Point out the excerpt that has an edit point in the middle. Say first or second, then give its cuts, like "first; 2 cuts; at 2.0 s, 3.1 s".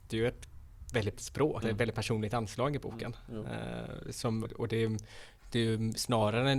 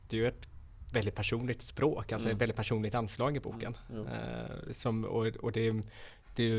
first; 3 cuts; at 1.1 s, 1.6 s, 4.5 s